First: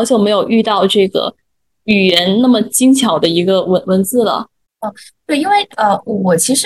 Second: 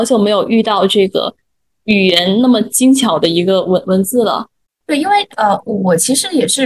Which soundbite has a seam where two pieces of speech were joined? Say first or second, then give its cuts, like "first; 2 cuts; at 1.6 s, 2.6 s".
second; 1 cut; at 4.8 s